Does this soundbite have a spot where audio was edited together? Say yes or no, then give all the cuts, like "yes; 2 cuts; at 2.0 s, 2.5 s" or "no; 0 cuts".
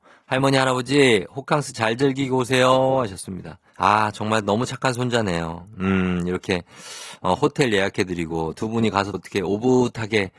yes; 2 cuts; at 3.7 s, 9.1 s